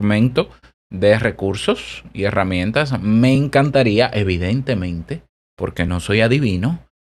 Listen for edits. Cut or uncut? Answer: uncut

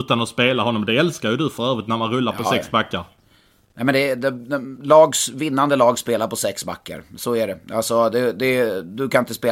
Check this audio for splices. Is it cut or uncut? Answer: uncut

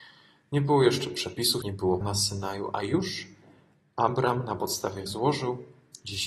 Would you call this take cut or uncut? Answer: cut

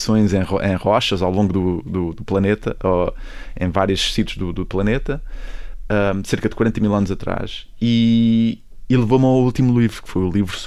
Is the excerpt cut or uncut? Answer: uncut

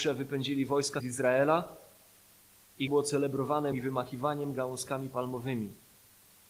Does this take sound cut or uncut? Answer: cut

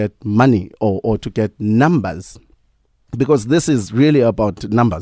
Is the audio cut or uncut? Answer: uncut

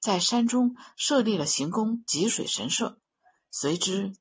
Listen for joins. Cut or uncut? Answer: uncut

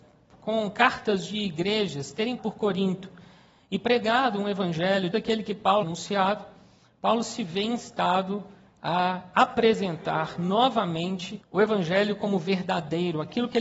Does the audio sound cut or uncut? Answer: cut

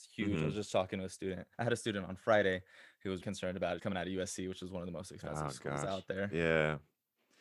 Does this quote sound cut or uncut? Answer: cut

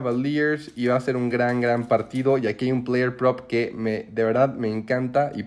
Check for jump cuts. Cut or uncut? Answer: uncut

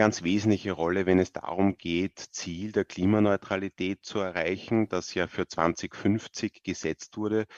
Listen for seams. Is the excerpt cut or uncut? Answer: cut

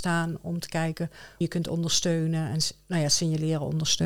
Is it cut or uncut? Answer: cut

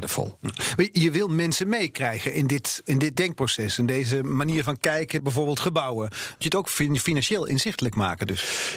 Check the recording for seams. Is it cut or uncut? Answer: cut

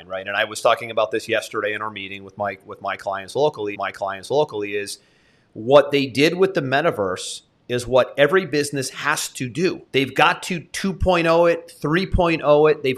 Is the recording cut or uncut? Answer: cut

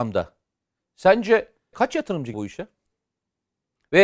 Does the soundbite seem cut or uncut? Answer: cut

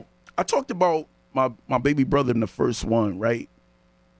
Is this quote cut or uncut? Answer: cut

